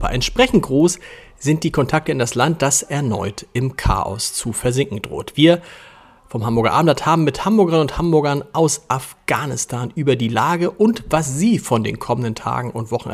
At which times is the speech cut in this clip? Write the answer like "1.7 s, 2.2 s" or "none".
none